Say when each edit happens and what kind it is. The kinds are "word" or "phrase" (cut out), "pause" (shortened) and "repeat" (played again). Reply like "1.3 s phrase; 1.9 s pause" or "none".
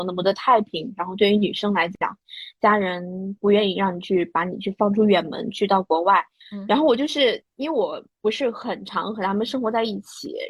6.4 s pause; 7.5 s pause